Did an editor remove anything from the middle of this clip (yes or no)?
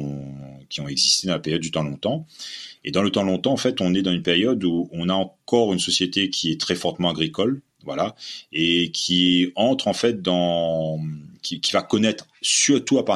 no